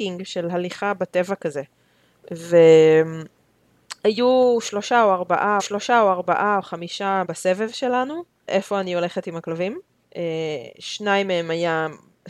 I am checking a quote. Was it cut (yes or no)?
yes